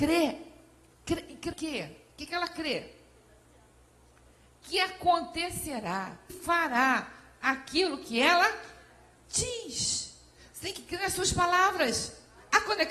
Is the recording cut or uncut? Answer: cut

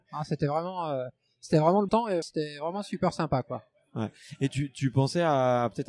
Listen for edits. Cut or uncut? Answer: cut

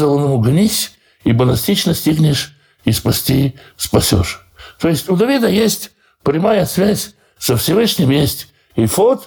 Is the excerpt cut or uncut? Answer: uncut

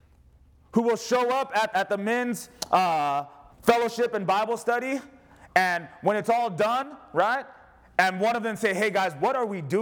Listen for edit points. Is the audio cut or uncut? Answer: cut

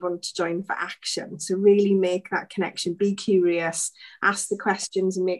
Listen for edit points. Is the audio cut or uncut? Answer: uncut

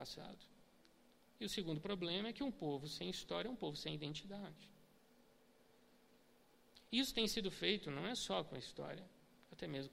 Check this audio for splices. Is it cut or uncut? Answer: uncut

